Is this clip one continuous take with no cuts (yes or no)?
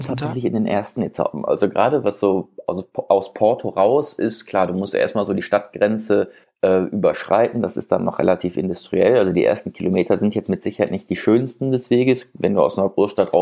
no